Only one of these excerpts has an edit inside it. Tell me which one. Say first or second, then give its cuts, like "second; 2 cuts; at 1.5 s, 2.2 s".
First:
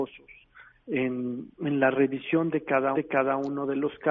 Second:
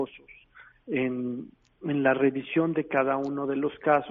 first; 2 cuts; at 1.5 s, 2.9 s